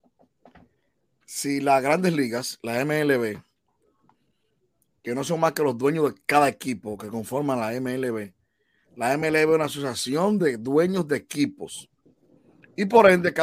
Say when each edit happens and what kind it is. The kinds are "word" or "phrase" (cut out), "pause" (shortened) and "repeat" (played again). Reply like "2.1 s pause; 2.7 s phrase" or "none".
none